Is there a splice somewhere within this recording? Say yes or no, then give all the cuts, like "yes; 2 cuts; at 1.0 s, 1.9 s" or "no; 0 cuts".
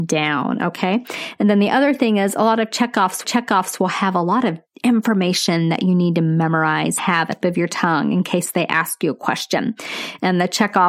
yes; 4 cuts; at 3.2 s, 4.7 s, 7.0 s, 7.4 s